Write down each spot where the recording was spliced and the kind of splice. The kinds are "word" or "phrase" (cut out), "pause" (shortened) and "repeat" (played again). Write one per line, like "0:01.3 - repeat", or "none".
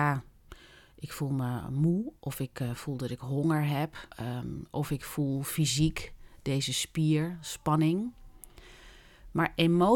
0:04.1 - pause